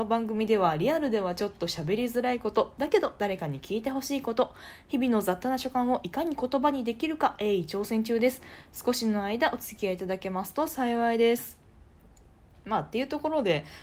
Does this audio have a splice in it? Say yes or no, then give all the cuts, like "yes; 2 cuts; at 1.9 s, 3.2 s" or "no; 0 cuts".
no; 0 cuts